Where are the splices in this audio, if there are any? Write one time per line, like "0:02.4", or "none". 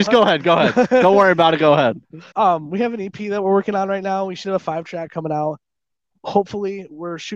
0:02.3